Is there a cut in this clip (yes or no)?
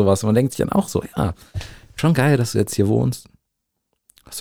yes